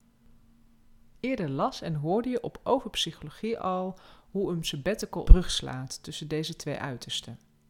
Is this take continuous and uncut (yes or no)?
no